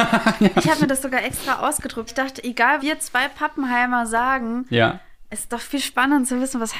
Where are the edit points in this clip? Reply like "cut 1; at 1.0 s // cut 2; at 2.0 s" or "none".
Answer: cut 1; at 2.1 s // cut 2; at 2.8 s